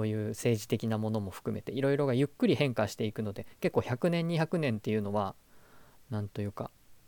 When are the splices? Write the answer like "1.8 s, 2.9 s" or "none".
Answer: none

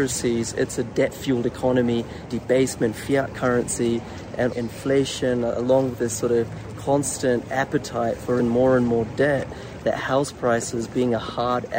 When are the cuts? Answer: 2.3 s, 4.5 s, 5.9 s, 8.4 s, 9.8 s

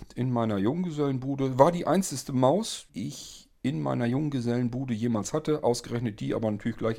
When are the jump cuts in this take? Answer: 2.9 s

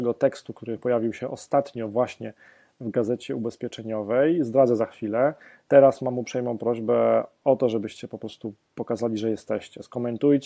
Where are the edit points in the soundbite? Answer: none

